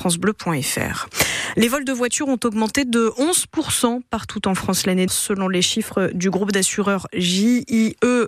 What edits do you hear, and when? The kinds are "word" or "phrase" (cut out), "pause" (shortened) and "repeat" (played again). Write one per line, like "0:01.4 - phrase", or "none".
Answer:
0:05.1 - word